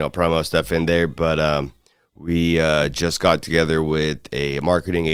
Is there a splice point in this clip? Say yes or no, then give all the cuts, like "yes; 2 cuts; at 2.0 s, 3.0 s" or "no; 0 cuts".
no; 0 cuts